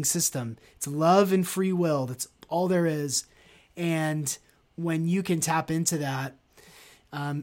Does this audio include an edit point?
no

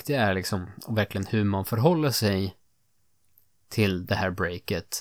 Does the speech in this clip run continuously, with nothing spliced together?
yes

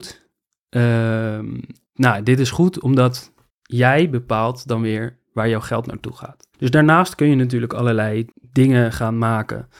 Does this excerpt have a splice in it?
yes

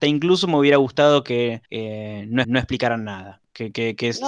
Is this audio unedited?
no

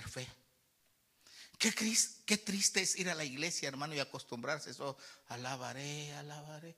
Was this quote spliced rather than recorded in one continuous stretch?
no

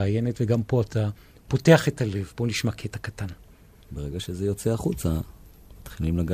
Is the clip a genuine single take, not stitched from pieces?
yes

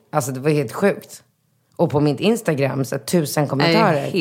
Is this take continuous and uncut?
yes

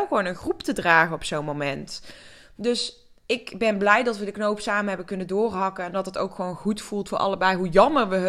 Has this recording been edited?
no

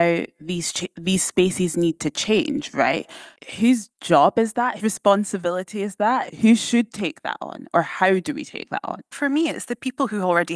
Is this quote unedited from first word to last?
no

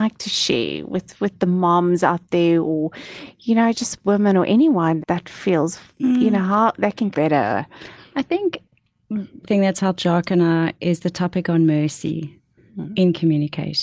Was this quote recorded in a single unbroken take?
no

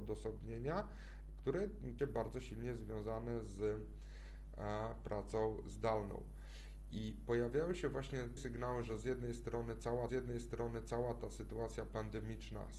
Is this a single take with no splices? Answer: no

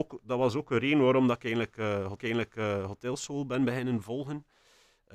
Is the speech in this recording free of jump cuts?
no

